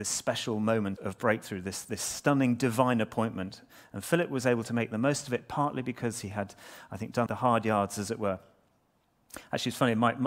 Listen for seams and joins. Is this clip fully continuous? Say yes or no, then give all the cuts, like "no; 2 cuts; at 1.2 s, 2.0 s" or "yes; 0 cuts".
no; 2 cuts; at 1.0 s, 7.3 s